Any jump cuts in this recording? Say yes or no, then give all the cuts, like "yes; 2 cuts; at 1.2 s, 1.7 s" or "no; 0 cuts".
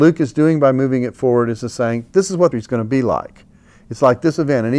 yes; 1 cut; at 2.5 s